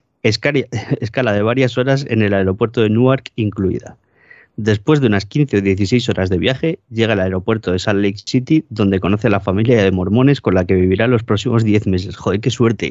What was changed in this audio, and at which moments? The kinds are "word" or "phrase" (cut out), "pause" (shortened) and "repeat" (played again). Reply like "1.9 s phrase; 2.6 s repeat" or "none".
none